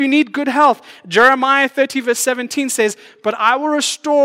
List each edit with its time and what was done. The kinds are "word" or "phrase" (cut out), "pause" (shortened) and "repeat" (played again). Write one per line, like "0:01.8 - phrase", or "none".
none